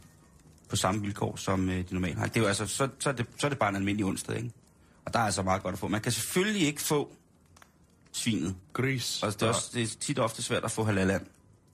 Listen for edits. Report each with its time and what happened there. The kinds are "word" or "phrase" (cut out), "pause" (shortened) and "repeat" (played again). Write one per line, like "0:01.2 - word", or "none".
none